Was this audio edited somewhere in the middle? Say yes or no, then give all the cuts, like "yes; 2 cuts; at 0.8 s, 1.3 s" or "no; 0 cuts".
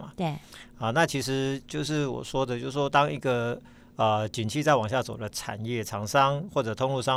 no; 0 cuts